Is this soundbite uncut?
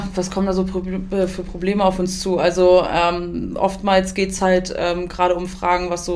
yes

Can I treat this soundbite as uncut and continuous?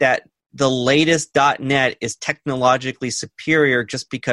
yes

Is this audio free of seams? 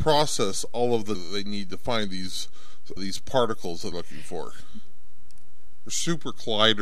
no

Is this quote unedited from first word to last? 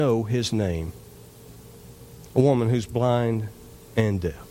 yes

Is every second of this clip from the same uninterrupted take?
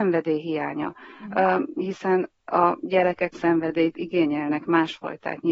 no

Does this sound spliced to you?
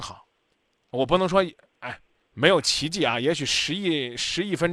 no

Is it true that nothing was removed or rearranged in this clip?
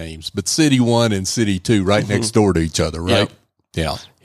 yes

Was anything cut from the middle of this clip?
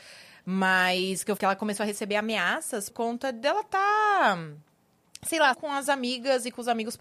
yes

